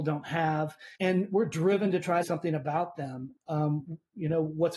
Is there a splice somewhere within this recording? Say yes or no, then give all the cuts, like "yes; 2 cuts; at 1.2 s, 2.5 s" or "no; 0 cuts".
yes; 2 cuts; at 0.9 s, 2.2 s